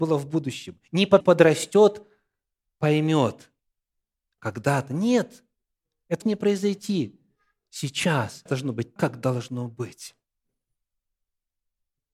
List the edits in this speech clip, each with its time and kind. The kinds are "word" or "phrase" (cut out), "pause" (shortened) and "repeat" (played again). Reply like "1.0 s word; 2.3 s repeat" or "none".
1.2 s word; 4.4 s word; 6.2 s word; 8.5 s word; 9.0 s word